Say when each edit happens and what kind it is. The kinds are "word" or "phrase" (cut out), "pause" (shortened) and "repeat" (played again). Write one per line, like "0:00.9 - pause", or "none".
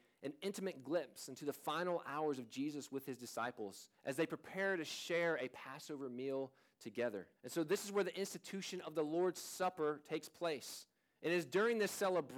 0:04.0 - pause
0:07.4 - pause
0:11.0 - pause